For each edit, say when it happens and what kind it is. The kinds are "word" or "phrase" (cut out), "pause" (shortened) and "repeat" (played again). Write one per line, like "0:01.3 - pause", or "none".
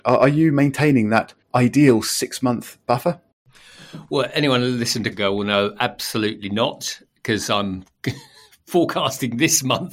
0:01.4 - pause
0:02.8 - pause
0:05.1 - phrase